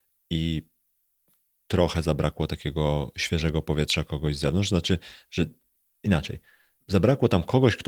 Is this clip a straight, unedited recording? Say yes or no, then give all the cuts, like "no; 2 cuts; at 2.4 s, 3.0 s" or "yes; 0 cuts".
no; 2 cuts; at 2.5 s, 6.8 s